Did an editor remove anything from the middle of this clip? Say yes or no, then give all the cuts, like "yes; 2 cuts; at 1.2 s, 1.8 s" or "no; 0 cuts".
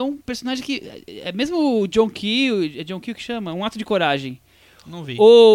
no; 0 cuts